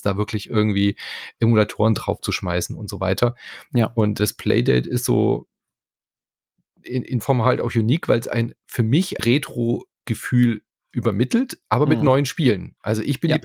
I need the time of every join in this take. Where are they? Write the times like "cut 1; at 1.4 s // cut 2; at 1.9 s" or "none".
cut 1; at 4.2 s // cut 2; at 7.2 s // cut 3; at 9.2 s